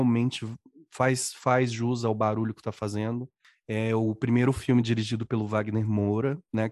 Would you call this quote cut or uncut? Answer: uncut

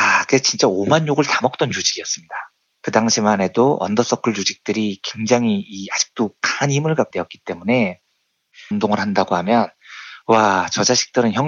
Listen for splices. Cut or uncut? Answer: cut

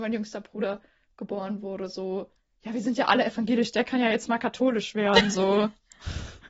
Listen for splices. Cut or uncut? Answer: uncut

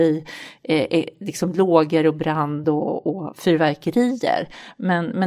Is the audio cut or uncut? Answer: uncut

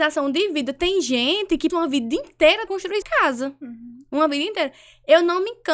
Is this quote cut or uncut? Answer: cut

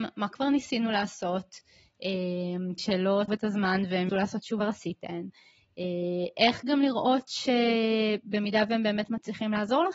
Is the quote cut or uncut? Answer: cut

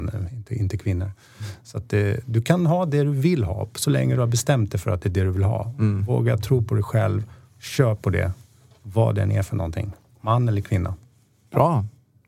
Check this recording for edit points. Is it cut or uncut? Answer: uncut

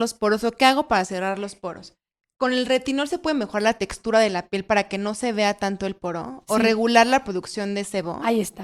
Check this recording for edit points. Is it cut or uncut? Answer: uncut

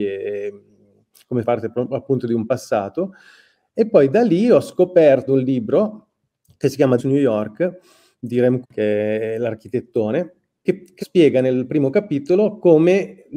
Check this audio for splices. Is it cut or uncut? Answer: cut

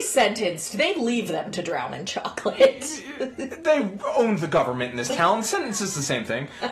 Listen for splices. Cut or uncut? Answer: uncut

